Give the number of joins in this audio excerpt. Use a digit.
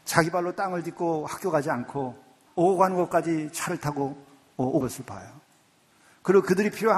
2